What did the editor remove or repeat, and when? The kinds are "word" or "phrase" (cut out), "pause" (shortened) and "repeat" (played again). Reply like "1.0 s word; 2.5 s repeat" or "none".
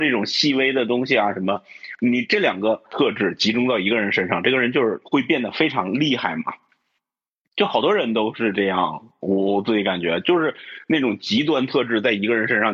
none